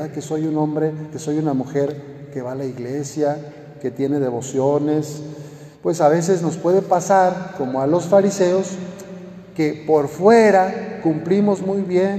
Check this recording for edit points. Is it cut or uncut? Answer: cut